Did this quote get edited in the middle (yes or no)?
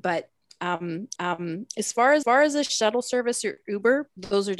yes